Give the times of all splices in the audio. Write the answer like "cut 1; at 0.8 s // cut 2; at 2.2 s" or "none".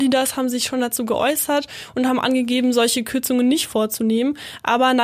none